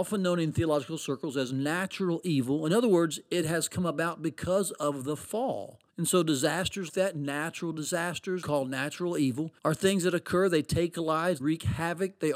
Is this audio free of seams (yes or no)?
no